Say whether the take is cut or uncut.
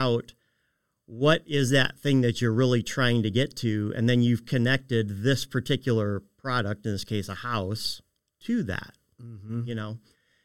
uncut